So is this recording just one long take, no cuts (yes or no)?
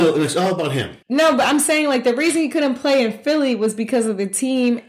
no